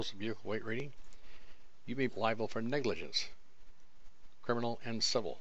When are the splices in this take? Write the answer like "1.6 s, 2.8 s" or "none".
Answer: 2.1 s